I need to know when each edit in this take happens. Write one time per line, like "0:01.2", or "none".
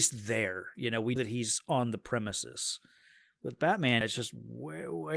0:01.2
0:04.0